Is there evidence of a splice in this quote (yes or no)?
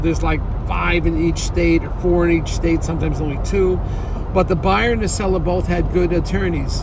no